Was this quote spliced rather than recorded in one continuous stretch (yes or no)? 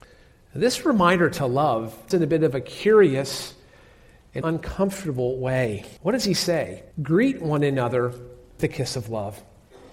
yes